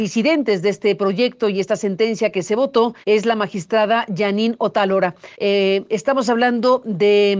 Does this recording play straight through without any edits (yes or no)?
no